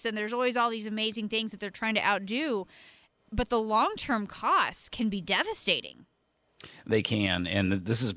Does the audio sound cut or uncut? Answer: uncut